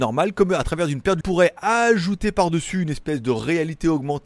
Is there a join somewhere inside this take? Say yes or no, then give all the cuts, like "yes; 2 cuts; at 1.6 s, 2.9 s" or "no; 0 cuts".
yes; 1 cut; at 1.2 s